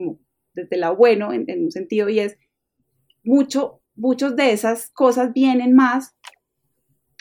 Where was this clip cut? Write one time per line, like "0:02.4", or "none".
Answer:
0:03.9